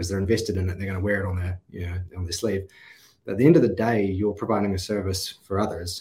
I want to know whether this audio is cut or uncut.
uncut